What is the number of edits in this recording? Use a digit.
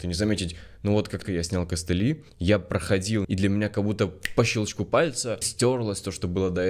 4